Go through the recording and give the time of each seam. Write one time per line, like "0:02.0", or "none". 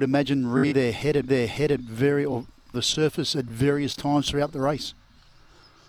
0:01.3
0:02.7